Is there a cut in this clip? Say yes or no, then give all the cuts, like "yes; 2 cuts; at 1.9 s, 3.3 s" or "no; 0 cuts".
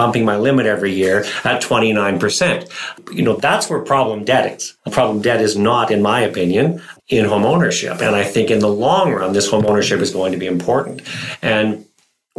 yes; 2 cuts; at 4.8 s, 7.0 s